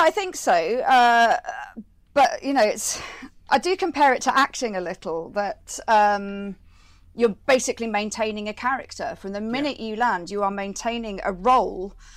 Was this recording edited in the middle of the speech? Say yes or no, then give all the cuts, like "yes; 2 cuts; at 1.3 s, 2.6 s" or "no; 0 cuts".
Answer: no; 0 cuts